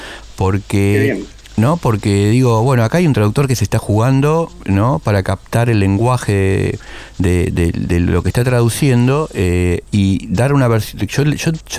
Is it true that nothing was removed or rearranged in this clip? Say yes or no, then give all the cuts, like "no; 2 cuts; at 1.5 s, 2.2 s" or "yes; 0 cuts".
yes; 0 cuts